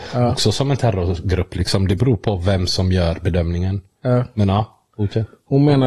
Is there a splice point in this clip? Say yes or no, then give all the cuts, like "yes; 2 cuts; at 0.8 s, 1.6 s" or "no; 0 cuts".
no; 0 cuts